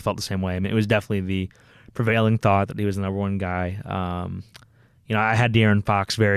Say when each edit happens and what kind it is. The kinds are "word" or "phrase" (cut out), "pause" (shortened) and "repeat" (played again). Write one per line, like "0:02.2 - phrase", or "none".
none